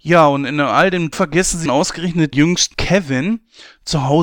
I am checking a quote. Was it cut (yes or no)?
yes